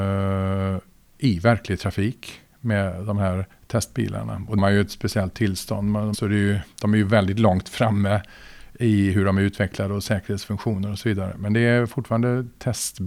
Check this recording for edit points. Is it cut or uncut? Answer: cut